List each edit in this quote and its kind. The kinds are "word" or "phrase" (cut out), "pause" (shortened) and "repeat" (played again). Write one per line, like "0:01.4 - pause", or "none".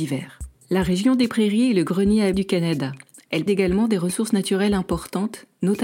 0:02.3 - word
0:03.5 - word